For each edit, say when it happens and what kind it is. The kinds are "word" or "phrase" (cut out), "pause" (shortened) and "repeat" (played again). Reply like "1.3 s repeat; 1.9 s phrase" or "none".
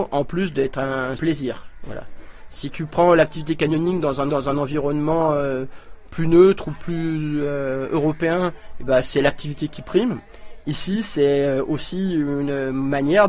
1.2 s word; 4.3 s repeat